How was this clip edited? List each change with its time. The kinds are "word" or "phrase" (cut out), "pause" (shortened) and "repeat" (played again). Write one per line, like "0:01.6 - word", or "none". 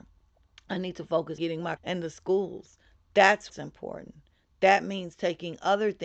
0:01.4 - word
0:01.8 - word
0:03.5 - word